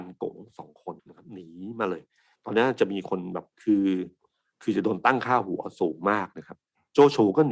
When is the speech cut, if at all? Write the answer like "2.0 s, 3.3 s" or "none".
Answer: 1.0 s, 3.5 s